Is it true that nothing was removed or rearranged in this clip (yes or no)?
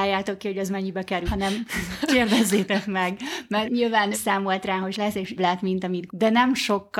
no